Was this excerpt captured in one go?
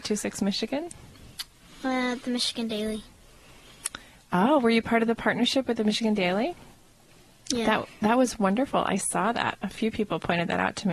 yes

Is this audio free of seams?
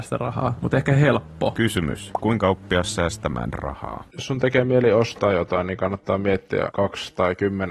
yes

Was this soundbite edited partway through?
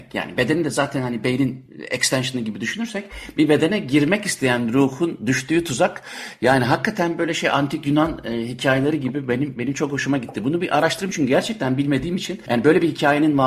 no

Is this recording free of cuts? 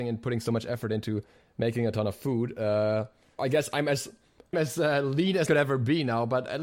no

